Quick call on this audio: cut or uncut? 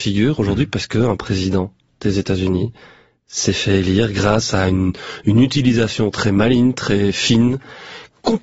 uncut